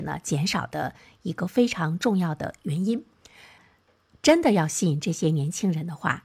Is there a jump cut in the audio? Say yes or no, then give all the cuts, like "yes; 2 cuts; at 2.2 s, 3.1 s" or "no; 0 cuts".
no; 0 cuts